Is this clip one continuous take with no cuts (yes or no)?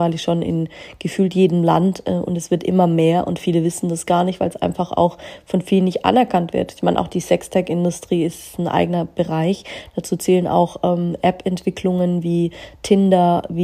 yes